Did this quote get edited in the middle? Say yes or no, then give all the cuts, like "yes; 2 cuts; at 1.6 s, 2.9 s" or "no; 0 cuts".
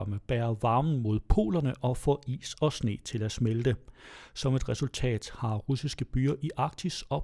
no; 0 cuts